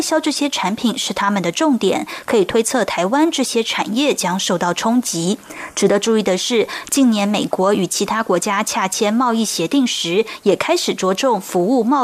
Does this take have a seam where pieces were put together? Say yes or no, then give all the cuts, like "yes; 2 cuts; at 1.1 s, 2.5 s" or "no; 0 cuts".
no; 0 cuts